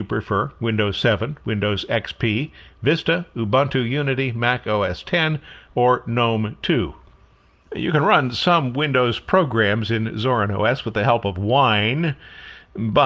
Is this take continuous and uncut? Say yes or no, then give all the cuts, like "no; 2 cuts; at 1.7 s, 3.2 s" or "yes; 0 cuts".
yes; 0 cuts